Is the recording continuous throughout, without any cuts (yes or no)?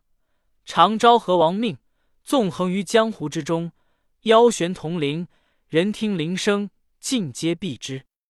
yes